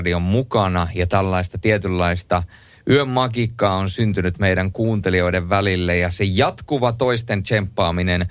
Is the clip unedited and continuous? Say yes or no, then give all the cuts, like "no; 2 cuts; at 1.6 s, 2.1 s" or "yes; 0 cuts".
yes; 0 cuts